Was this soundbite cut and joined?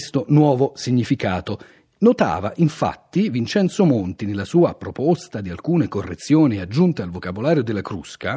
no; 0 cuts

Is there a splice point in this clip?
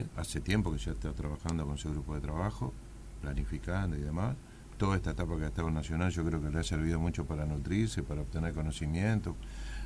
no; 0 cuts

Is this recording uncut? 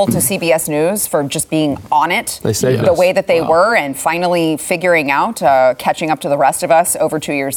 yes; 0 cuts

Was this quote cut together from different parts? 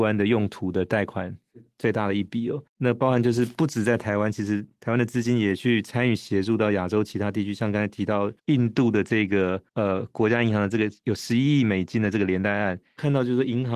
yes; 3 cuts; at 2.7 s, 8.4 s, 9.7 s

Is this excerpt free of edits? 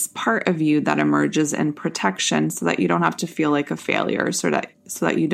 yes; 0 cuts

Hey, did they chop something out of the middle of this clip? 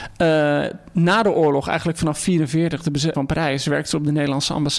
yes; 1 cut; at 3.1 s

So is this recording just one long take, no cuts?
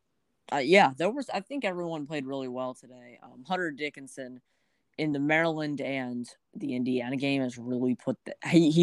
yes; 0 cuts

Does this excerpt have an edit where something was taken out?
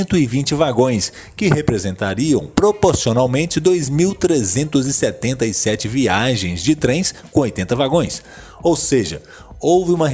no; 0 cuts

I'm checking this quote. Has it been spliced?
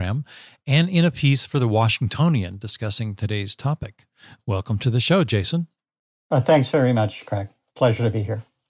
no; 0 cuts

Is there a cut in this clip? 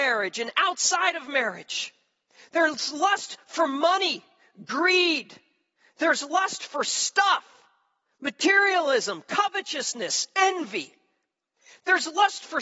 no; 0 cuts

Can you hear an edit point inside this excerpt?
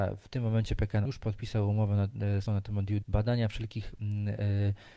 yes; 3 cuts; at 1.0 s, 2.5 s, 3.0 s

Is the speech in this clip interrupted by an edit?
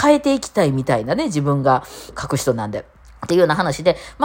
yes; 2 cuts; at 2.1 s, 3.0 s

